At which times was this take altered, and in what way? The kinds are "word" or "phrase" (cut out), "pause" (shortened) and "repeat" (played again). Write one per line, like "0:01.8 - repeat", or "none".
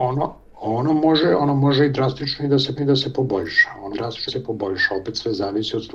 0:02.8 - repeat
0:03.9 - word
0:04.3 - word